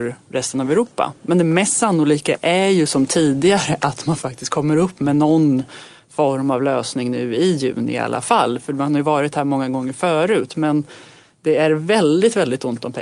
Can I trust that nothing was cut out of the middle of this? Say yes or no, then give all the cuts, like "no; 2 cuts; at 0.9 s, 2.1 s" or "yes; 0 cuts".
yes; 0 cuts